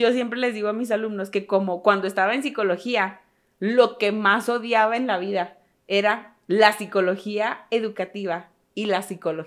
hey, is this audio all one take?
yes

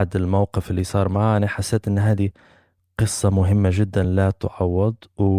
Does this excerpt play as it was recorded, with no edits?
yes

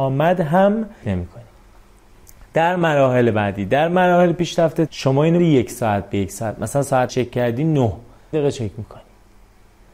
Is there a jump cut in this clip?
yes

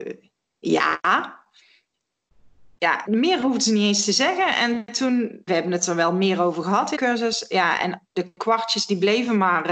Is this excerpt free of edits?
no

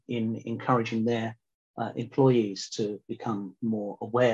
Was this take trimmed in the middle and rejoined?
no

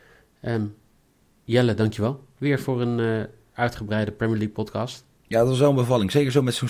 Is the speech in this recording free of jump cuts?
yes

